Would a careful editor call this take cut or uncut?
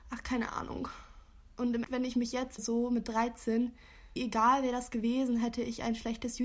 cut